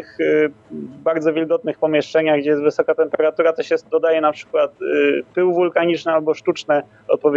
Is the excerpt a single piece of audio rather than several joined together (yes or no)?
yes